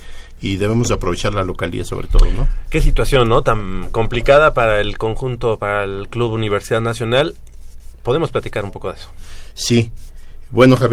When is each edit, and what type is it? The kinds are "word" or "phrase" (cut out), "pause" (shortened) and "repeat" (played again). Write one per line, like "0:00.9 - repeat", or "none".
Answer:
none